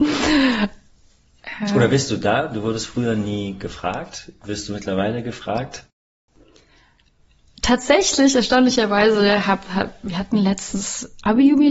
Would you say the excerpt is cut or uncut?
uncut